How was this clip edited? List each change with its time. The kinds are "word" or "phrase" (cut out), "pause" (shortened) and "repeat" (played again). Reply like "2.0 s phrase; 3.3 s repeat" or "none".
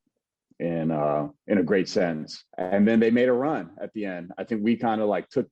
1.4 s pause; 2.5 s pause

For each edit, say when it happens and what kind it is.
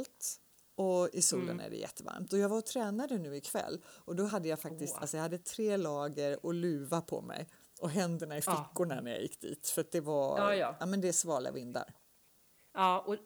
none

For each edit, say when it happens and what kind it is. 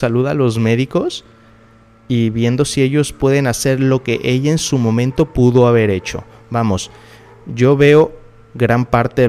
none

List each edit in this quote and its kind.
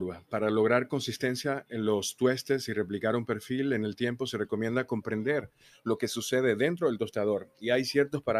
none

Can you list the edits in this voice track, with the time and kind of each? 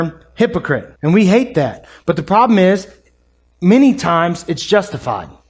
1.0 s pause

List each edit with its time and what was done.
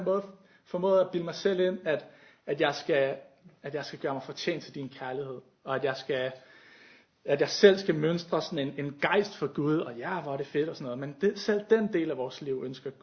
none

